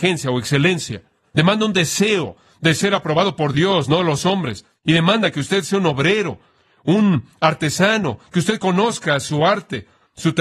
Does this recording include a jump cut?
no; 0 cuts

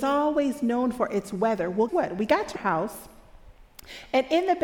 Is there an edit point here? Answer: yes; 2 cuts; at 1.9 s, 2.6 s

